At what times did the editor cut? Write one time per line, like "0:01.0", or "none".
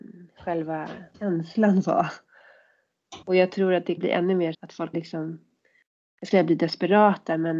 0:01.1
0:03.2
0:04.0
0:04.5
0:04.9
0:06.3